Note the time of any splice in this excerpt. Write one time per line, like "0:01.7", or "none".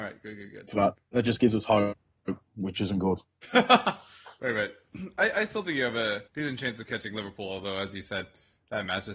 0:01.0
0:03.2
0:06.3